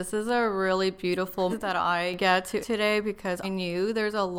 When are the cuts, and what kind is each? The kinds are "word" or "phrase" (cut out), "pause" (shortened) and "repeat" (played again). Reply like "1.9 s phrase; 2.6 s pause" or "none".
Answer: 1.5 s word; 2.6 s word; 3.4 s word